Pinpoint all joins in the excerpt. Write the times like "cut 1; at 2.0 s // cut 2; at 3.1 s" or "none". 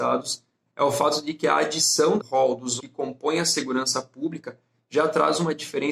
cut 1; at 2.2 s // cut 2; at 2.8 s